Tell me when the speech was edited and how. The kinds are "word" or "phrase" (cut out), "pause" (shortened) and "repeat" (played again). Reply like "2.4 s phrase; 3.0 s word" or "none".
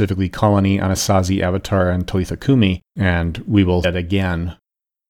2.9 s pause; 3.8 s word